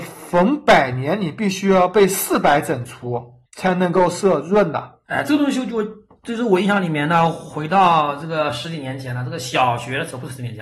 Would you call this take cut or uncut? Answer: cut